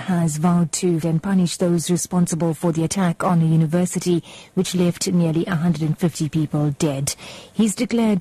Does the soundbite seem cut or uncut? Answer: cut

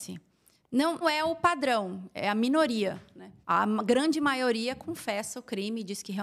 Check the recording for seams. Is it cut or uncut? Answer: cut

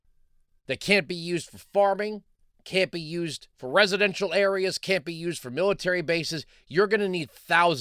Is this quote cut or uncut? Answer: cut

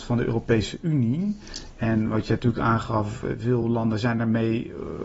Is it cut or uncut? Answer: uncut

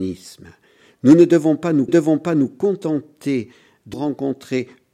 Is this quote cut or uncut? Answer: cut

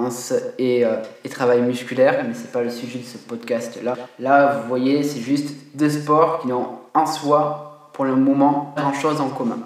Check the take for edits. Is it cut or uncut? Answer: cut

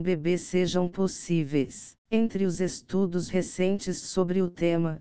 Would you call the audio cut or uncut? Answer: cut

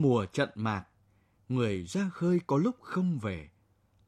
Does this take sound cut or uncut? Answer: uncut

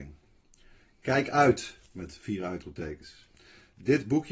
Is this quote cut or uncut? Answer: cut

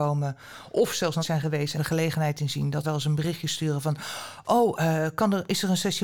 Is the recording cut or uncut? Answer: cut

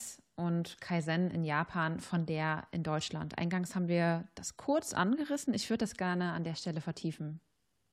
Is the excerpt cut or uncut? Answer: uncut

